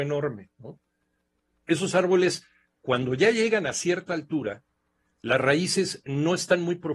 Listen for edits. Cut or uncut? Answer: uncut